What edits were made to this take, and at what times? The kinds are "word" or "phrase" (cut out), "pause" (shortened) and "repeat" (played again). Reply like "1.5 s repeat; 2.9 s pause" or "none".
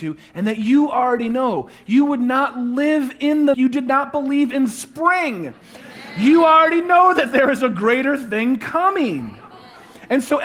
3.5 s phrase